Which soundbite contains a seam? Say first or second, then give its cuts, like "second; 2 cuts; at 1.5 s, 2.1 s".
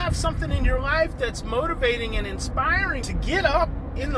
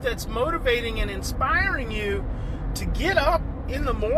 first; 1 cut; at 3.0 s